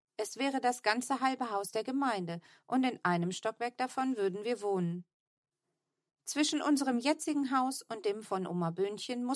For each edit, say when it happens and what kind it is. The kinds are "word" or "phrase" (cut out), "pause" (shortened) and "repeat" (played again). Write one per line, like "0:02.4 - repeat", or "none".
none